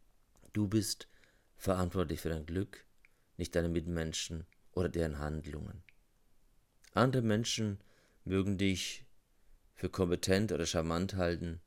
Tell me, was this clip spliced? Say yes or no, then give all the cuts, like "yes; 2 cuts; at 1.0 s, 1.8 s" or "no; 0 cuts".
no; 0 cuts